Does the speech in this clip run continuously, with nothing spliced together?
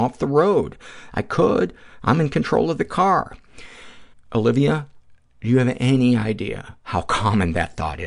no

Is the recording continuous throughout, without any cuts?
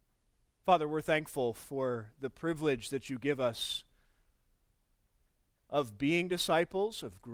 yes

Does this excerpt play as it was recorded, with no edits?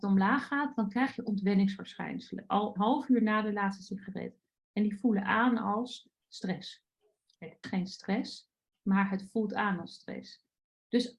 no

